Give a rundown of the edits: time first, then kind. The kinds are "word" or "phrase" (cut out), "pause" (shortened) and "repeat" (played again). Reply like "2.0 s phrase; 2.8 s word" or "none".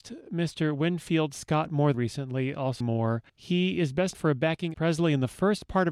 1.9 s word; 2.8 s phrase; 3.3 s pause; 4.1 s word; 4.7 s word